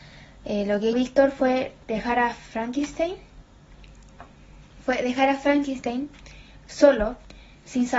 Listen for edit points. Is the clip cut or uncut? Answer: cut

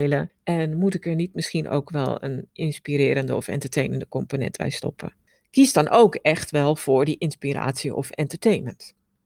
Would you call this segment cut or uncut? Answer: uncut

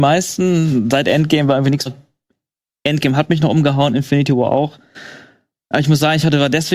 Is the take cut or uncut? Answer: cut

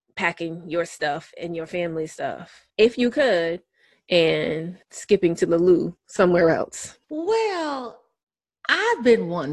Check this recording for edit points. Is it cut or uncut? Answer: cut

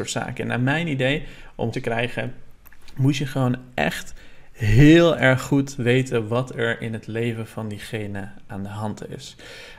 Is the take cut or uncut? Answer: cut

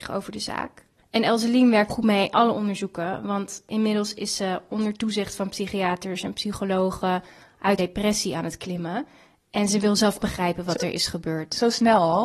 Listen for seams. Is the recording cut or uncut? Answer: cut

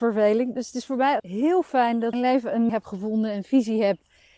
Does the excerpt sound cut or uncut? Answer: cut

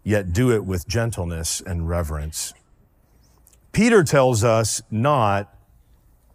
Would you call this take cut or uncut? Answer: uncut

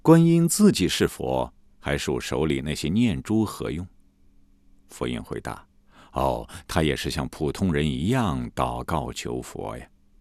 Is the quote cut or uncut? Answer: uncut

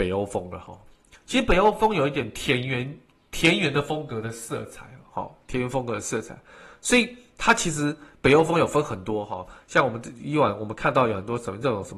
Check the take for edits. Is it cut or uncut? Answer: uncut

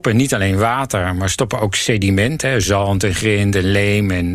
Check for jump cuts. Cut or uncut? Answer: uncut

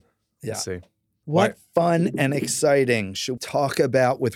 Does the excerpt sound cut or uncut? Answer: cut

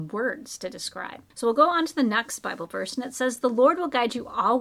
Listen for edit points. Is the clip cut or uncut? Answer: uncut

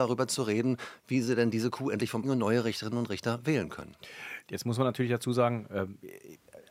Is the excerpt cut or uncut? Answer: cut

